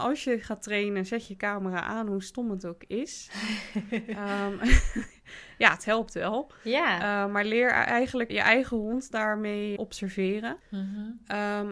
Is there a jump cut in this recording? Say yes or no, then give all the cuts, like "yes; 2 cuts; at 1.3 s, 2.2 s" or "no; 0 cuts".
yes; 3 cuts; at 8.3 s, 9.8 s, 10.6 s